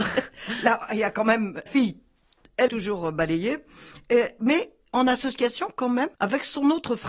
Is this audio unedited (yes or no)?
no